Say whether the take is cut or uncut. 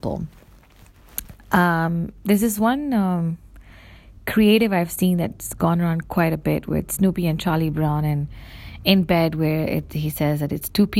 uncut